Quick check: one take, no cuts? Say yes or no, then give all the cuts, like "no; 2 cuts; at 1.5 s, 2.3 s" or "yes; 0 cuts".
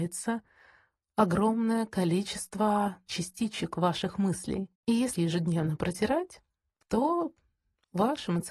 no; 3 cuts; at 3.1 s, 4.8 s, 5.2 s